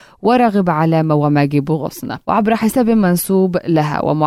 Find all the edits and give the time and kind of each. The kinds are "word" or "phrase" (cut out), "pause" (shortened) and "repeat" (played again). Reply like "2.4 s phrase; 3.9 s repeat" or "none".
2.2 s pause